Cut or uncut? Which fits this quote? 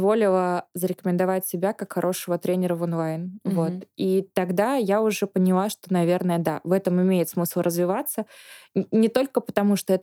uncut